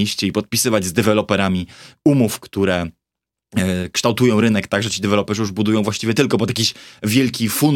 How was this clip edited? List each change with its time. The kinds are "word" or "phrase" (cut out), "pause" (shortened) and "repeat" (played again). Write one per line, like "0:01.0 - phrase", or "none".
none